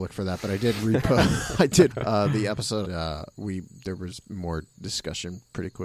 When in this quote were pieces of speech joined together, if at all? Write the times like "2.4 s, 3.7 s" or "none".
1.9 s, 2.8 s, 3.3 s

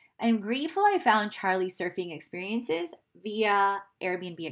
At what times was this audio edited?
none

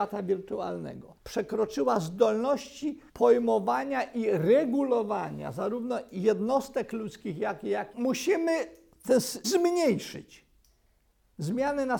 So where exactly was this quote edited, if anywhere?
1.2 s, 3.1 s, 7.9 s, 9.4 s

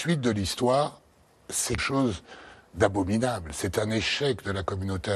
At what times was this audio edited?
1.8 s

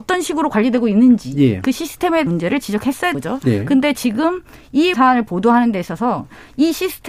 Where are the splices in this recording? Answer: 2.3 s, 3.1 s, 4.9 s

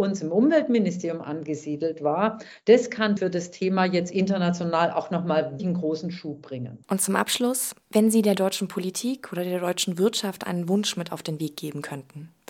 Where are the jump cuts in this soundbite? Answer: 3.2 s, 5.6 s, 6.8 s, 7.8 s

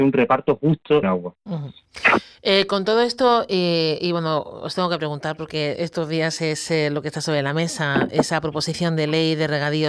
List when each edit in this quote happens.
1.0 s

